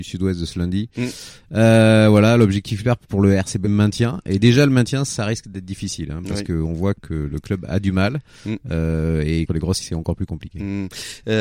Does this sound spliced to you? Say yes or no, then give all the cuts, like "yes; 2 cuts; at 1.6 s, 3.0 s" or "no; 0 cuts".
yes; 4 cuts; at 3.0 s, 3.6 s, 9.5 s, 9.8 s